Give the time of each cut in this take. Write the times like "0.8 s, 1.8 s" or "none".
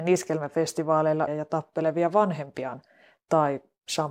1.3 s